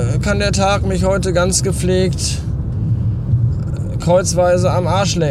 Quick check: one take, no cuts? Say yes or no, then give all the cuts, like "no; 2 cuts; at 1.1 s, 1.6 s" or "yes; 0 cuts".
yes; 0 cuts